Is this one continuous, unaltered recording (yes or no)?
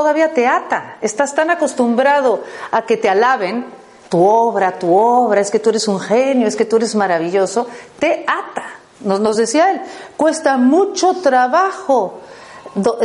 yes